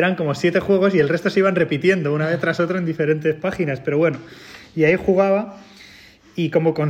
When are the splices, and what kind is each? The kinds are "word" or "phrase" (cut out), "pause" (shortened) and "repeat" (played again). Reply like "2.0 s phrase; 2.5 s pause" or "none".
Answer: none